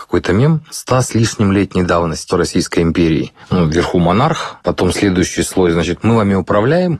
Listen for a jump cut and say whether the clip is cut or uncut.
cut